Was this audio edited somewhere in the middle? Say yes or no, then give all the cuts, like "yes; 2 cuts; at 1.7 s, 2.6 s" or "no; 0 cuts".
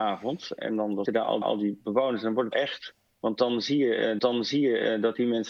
yes; 4 cuts; at 1.1 s, 1.4 s, 2.5 s, 4.2 s